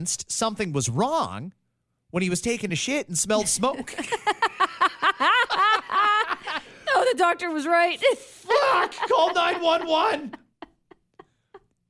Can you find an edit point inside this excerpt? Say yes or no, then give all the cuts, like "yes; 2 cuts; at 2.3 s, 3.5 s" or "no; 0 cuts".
no; 0 cuts